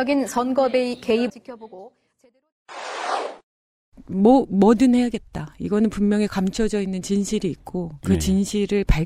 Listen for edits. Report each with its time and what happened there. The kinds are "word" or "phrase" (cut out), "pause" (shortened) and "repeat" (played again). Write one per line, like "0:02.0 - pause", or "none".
0:01.3 - phrase